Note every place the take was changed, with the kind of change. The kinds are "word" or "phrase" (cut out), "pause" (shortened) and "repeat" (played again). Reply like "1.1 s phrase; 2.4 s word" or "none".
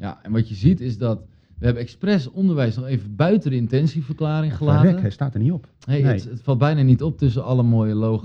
none